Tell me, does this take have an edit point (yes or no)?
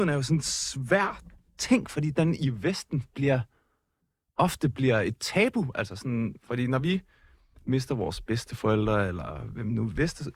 no